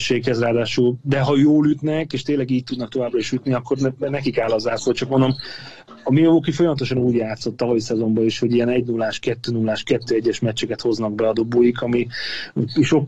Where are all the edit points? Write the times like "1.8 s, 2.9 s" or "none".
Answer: none